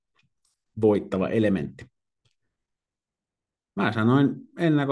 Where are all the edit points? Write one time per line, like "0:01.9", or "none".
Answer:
none